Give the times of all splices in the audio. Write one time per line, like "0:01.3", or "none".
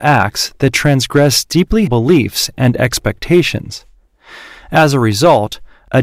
0:01.9